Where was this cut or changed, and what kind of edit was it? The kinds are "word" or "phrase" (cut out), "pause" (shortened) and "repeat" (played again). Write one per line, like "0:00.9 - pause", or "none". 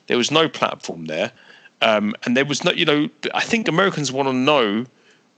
none